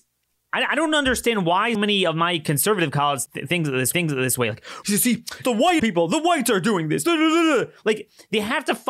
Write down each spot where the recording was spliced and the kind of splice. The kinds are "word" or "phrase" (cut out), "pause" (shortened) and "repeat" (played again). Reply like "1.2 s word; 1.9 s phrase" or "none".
1.7 s word; 3.3 s word; 3.9 s repeat; 4.8 s word; 5.4 s word; 5.8 s word

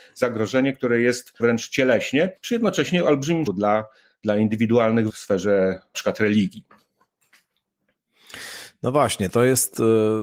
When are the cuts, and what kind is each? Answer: 1.4 s word; 2.4 s pause; 3.5 s word; 5.1 s word; 5.9 s word

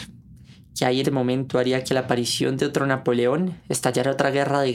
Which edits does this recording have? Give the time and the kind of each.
1.0 s word

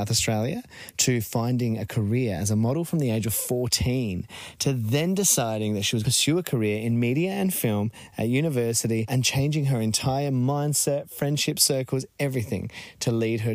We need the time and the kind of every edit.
none

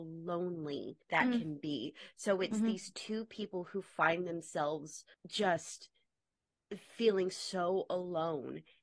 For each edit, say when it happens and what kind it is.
1.0 s pause; 5.1 s pause

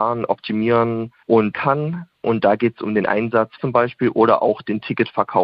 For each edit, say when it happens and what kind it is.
1.5 s word; 3.6 s phrase

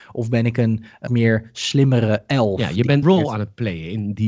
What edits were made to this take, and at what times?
1.1 s word; 3.0 s word

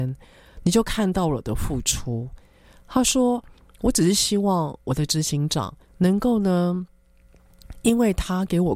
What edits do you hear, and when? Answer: 5.9 s pause

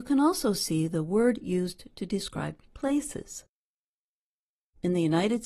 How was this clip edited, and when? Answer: none

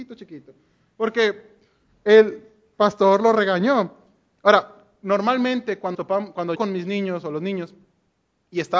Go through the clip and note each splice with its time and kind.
5.9 s word; 6.6 s word

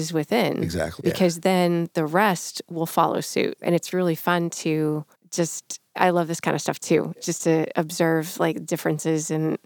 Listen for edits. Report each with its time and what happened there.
none

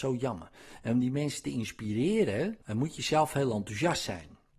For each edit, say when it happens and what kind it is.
2.6 s pause

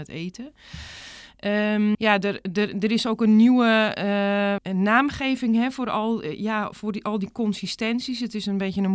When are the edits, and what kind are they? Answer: 1.9 s word; 4.6 s word

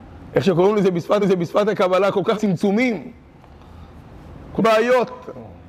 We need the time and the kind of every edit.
1.2 s repeat; 2.3 s word; 4.6 s phrase

